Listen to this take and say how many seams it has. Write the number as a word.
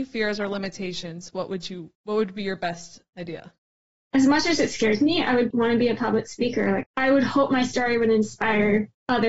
zero